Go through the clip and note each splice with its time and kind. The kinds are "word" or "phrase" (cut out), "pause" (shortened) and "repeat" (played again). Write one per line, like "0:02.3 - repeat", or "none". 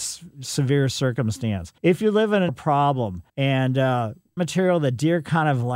0:01.8 - pause
0:02.5 - phrase
0:03.3 - pause
0:04.4 - phrase